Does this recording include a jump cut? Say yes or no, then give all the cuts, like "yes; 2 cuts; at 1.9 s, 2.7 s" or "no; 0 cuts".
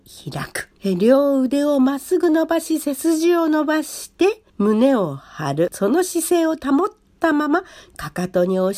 yes; 1 cut; at 4.5 s